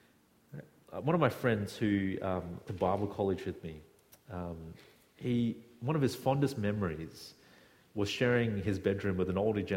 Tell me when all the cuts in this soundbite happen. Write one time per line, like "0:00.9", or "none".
0:02.7